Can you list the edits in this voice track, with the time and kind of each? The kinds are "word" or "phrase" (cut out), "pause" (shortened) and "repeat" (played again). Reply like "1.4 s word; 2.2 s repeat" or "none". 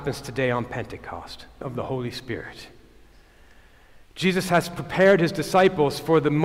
1.6 s phrase